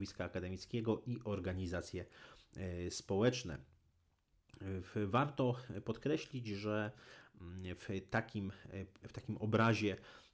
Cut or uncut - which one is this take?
cut